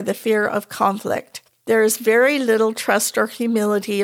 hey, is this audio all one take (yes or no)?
no